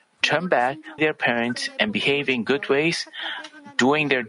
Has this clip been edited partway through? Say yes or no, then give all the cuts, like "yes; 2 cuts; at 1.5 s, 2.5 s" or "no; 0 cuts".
yes; 1 cut; at 1.0 s